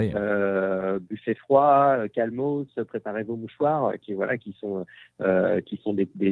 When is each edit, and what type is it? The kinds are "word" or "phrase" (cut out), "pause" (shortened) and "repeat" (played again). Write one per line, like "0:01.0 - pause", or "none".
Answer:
none